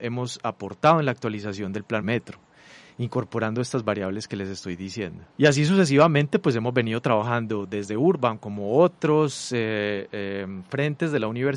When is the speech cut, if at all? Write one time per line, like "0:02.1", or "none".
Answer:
0:02.0
0:05.3